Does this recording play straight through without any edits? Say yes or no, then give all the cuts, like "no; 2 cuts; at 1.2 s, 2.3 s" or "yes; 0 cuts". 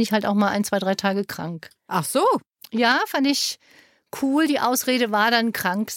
yes; 0 cuts